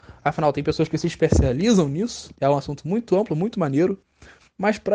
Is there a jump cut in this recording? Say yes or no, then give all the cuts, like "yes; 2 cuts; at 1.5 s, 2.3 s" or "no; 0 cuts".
yes; 1 cut; at 2.4 s